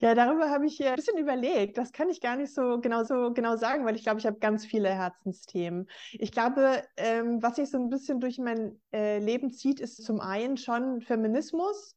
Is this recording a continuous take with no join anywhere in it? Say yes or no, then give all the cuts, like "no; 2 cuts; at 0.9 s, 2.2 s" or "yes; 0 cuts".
no; 3 cuts; at 0.9 s, 3.1 s, 10.0 s